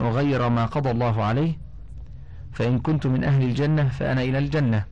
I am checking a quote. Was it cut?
no; 0 cuts

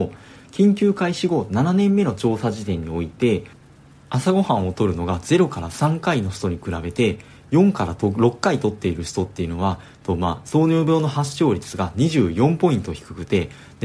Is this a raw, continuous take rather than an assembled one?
yes; 0 cuts

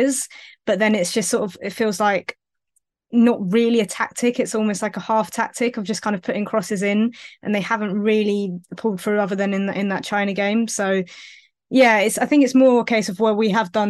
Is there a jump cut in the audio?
no; 0 cuts

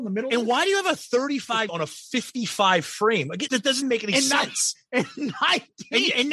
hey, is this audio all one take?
no; 3 cuts; at 1.7 s, 3.5 s, 3.8 s

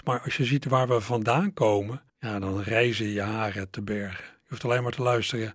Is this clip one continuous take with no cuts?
no; 1 cut; at 2.1 s

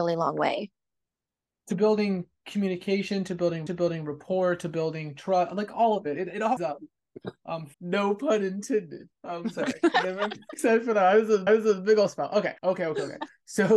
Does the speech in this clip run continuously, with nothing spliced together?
no; 7 cuts; at 3.7 s, 6.6 s, 7.7 s, 9.2 s, 10.5 s, 11.5 s, 12.6 s

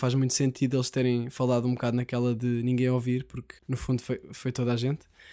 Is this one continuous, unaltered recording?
no; 1 cut; at 3.6 s

